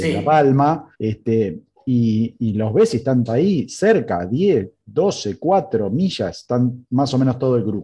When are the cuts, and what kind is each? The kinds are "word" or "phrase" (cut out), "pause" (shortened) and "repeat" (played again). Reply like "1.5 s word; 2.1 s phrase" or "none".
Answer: 0.9 s pause; 3.3 s word